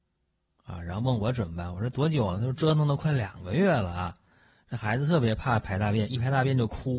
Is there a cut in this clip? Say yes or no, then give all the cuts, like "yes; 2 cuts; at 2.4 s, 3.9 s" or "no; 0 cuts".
no; 0 cuts